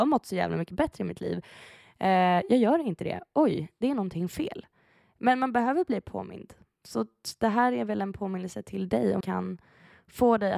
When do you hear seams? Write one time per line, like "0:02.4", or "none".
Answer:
0:09.2